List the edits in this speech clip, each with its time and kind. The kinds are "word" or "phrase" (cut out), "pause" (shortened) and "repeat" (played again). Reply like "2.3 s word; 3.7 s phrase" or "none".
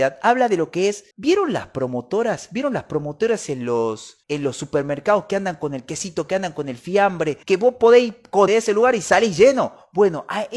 1.1 s pause; 4.2 s pause; 7.4 s pause; 8.5 s word